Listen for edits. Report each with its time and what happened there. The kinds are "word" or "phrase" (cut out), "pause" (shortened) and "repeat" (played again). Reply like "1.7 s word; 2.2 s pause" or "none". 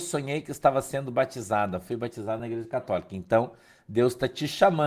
none